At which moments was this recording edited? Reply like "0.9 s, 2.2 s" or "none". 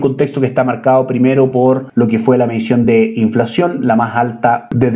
none